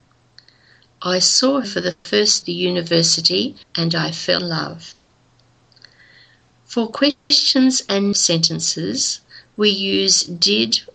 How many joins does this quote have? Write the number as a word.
five